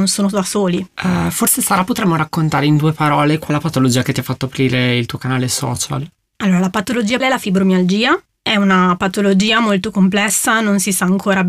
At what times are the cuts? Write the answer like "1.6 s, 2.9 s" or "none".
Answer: 3.5 s, 7.2 s